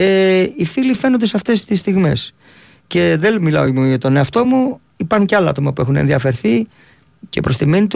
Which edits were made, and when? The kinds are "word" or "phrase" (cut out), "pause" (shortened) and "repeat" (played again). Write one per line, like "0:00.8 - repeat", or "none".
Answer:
none